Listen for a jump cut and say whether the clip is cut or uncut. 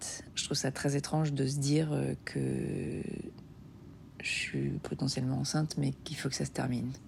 uncut